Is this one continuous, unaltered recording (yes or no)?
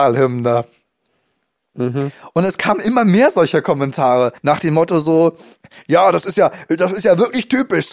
no